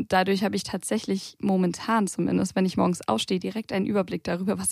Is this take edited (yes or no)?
no